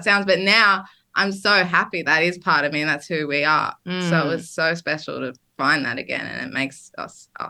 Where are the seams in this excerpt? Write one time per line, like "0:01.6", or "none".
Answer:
0:02.0